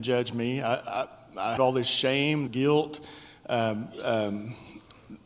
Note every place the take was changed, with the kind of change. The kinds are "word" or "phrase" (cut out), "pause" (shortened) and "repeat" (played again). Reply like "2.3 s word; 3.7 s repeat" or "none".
1.6 s word; 2.5 s word